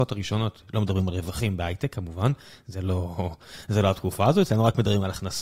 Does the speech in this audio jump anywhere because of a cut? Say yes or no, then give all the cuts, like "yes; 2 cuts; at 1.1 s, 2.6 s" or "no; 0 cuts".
no; 0 cuts